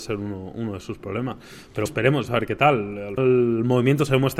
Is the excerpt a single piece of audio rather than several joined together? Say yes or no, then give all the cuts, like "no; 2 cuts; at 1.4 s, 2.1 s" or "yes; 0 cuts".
no; 3 cuts; at 1.9 s, 2.3 s, 3.2 s